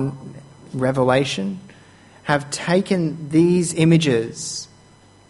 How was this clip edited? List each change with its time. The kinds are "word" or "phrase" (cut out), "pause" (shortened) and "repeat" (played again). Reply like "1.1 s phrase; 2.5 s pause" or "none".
none